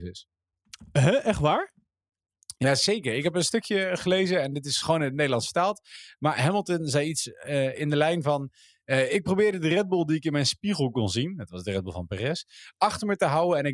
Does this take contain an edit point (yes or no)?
yes